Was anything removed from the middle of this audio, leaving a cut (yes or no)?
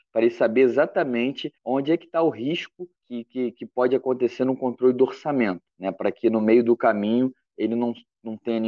yes